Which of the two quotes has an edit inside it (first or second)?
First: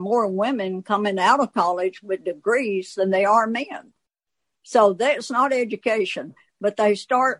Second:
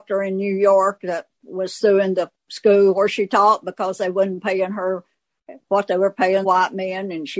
second